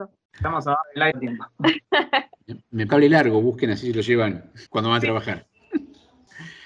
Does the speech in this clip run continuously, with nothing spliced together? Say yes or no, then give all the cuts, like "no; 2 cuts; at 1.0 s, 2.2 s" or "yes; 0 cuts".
no; 3 cuts; at 1.1 s, 2.9 s, 4.7 s